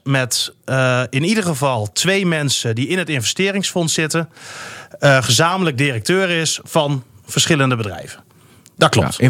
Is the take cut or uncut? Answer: uncut